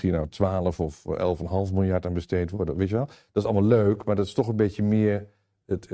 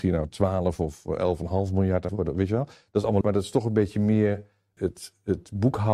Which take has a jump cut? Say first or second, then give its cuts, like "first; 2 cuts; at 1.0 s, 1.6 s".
second; 3 cuts; at 2.1 s, 3.2 s, 4.8 s